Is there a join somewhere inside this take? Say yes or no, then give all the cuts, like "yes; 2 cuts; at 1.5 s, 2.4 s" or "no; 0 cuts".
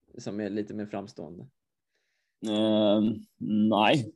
no; 0 cuts